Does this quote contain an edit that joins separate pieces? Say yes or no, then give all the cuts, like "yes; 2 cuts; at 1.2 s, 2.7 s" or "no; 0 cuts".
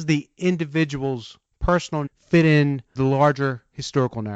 yes; 2 cuts; at 2.1 s, 3.0 s